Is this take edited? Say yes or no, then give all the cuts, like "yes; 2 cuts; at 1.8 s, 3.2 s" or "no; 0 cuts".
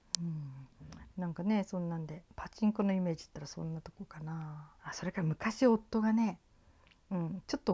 yes; 2 cuts; at 2.3 s, 4.7 s